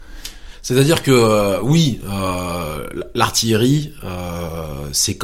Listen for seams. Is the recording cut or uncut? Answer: uncut